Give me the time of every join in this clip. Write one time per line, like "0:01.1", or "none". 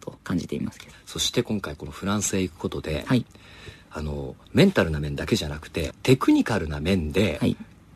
0:04.4
0:05.9